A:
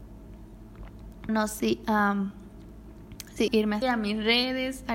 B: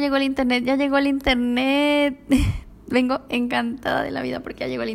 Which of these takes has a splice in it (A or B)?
A